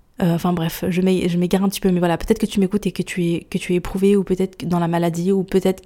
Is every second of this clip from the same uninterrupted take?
yes; 0 cuts

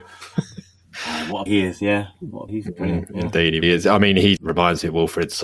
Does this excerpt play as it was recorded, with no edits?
no; 4 cuts; at 1.5 s, 2.5 s, 3.6 s, 4.4 s

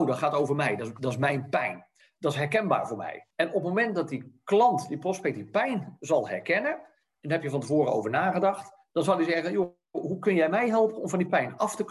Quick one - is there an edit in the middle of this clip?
yes; 2 cuts; at 2.0 s, 3.3 s

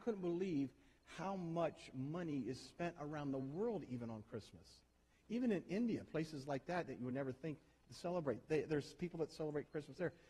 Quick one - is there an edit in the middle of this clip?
no; 0 cuts

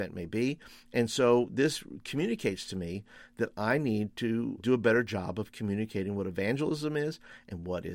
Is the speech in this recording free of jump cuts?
no; 1 cut; at 4.6 s

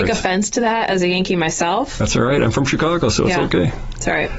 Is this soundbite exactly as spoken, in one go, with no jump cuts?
yes; 0 cuts

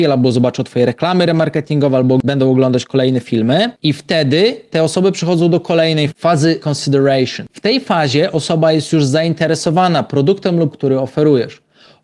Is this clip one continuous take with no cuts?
no; 4 cuts; at 3.8 s, 6.1 s, 6.6 s, 10.7 s

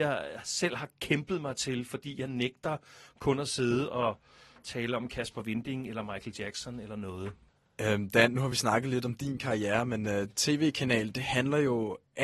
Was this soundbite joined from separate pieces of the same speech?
no; 0 cuts

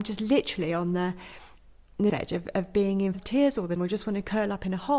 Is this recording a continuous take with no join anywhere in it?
no; 3 cuts; at 2.1 s, 3.1 s, 3.8 s

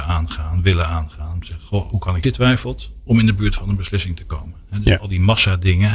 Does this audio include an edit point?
yes; 1 cut; at 2.2 s

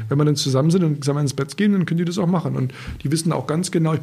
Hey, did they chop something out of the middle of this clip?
no; 0 cuts

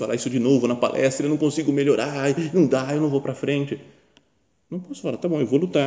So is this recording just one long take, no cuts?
yes; 0 cuts

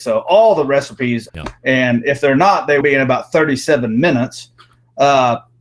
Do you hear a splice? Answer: yes; 2 cuts; at 1.3 s, 2.8 s

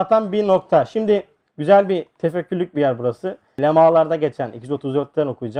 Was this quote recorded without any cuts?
yes; 0 cuts

